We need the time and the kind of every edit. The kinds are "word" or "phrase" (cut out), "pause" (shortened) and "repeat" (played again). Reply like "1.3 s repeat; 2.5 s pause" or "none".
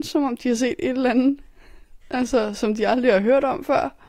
2.0 s pause